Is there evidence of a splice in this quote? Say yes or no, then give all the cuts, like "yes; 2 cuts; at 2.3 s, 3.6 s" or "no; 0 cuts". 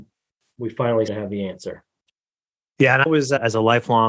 yes; 2 cuts; at 1.1 s, 3.1 s